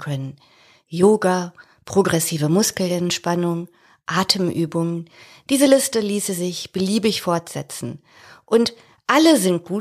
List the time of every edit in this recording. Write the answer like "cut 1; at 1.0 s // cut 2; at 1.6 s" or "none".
none